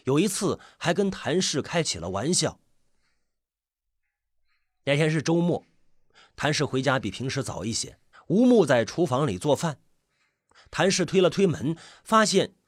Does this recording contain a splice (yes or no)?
yes